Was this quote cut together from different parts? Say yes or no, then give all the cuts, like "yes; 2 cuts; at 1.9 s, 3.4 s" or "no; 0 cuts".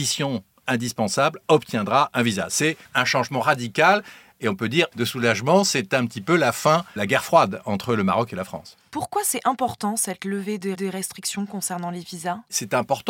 yes; 4 cuts; at 2.8 s, 4.9 s, 7.0 s, 10.7 s